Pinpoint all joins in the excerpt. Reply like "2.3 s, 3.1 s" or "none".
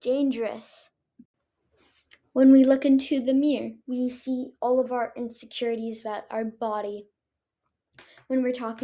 3.8 s